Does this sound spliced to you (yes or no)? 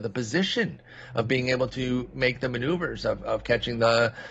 no